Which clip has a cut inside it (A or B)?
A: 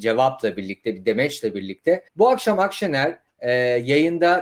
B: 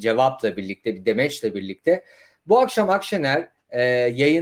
A